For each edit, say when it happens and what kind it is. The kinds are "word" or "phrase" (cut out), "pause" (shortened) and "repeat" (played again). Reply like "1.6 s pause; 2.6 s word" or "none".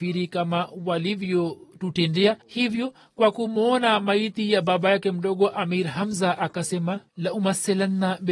2.4 s pause; 7.1 s pause